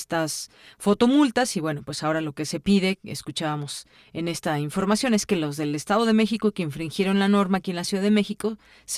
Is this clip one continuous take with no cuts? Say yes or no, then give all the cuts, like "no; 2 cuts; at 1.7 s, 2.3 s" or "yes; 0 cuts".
yes; 0 cuts